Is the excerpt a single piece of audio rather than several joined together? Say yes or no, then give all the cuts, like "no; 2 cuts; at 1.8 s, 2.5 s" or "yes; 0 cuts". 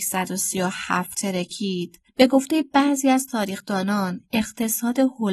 yes; 0 cuts